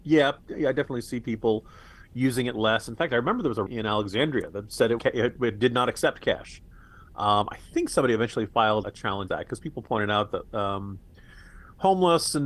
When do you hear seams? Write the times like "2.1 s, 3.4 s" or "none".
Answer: 3.7 s, 5.0 s, 8.8 s, 9.3 s